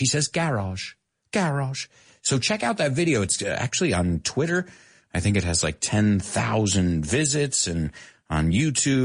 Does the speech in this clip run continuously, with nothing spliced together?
yes; 0 cuts

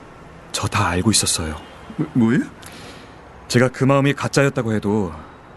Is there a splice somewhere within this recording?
no; 0 cuts

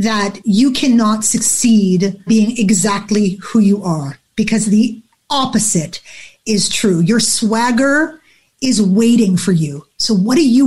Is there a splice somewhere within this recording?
yes; 1 cut; at 2.3 s

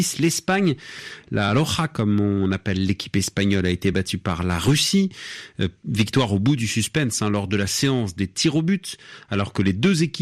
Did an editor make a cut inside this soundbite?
no; 0 cuts

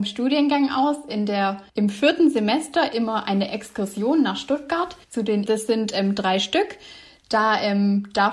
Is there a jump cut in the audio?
yes; 3 cuts; at 1.7 s, 5.0 s, 5.5 s

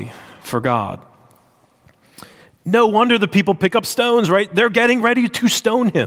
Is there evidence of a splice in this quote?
no; 0 cuts

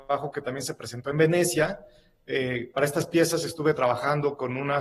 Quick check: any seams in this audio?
no; 0 cuts

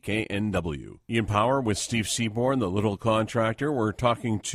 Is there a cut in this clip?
no; 0 cuts

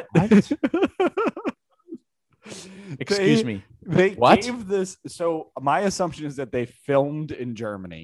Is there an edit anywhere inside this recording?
no; 0 cuts

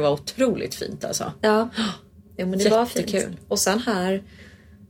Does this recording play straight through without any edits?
yes; 0 cuts

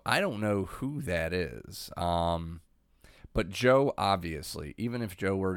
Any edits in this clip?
no; 0 cuts

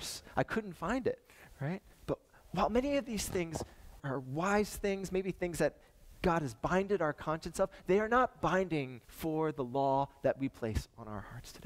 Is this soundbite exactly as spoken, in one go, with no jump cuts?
no; 3 cuts; at 1.9 s, 4.0 s, 9.0 s

